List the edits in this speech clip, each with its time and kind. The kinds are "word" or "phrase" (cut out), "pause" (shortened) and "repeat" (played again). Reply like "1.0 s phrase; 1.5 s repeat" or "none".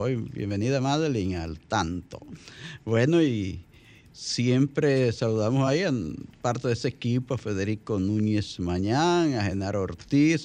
none